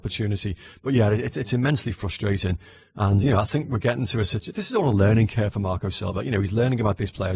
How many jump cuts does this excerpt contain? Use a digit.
0